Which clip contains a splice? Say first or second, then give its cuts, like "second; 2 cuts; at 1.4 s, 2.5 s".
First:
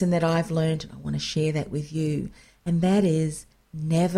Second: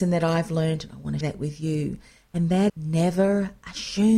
second; 2 cuts; at 1.2 s, 2.7 s